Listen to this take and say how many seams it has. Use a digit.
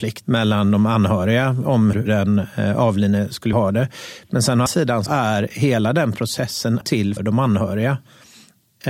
6